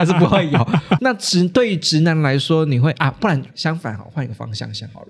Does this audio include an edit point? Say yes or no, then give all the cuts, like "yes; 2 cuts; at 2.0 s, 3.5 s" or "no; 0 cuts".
yes; 2 cuts; at 1.0 s, 3.5 s